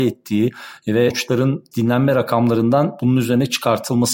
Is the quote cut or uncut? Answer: cut